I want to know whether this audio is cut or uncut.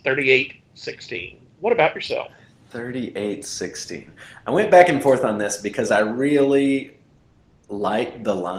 uncut